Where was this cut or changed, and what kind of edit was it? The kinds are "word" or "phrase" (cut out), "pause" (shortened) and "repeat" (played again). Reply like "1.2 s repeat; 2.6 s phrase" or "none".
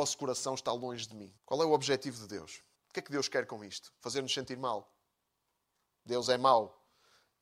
1.4 s pause; 2.8 s pause